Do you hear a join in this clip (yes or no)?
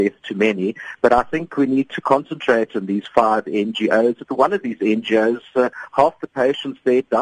no